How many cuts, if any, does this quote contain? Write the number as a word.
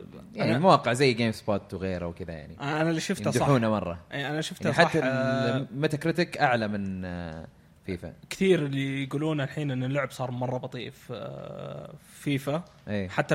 zero